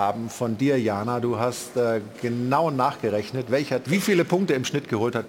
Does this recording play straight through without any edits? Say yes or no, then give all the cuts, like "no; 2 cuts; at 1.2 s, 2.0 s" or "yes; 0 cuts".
no; 1 cut; at 3.8 s